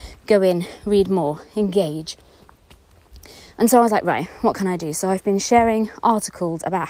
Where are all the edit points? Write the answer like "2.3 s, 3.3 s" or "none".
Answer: none